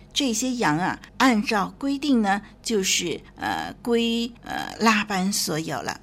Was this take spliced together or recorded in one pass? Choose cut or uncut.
cut